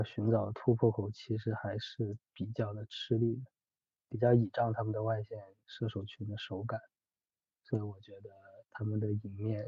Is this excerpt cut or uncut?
uncut